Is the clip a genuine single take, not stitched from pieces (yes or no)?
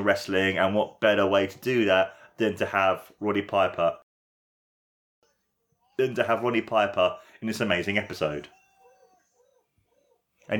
yes